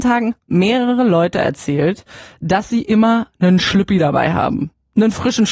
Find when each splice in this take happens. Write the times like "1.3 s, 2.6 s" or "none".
none